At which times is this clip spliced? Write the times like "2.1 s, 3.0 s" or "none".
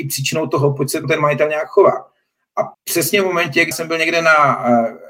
1.0 s, 2.7 s, 3.7 s